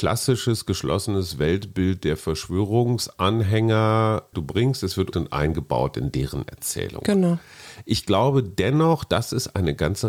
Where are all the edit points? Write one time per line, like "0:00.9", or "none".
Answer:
0:04.3
0:05.1